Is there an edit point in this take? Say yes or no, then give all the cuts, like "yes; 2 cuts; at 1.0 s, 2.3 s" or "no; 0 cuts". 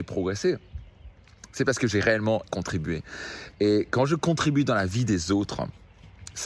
yes; 1 cut; at 2.4 s